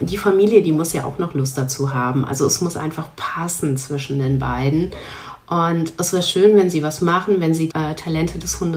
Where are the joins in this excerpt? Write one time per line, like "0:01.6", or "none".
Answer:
0:07.7

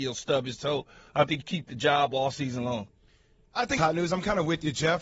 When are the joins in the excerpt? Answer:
0:01.4
0:03.8

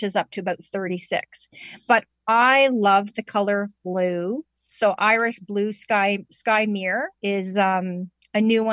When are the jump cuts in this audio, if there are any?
0:07.2

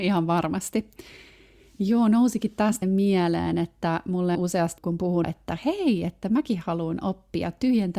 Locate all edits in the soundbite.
0:02.8
0:04.4
0:04.8
0:05.2

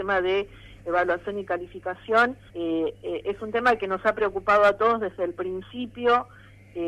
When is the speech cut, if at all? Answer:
0:02.5

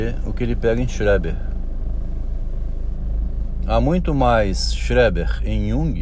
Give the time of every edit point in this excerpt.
none

